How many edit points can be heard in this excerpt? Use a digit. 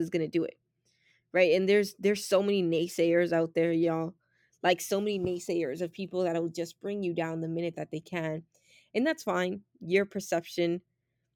0